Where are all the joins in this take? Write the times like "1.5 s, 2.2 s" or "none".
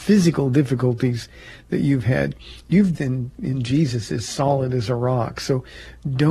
2.9 s